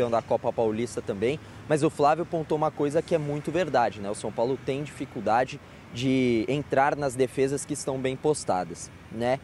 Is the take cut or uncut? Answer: uncut